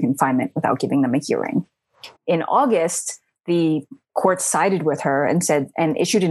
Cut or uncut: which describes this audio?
cut